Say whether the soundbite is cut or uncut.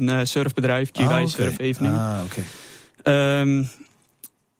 cut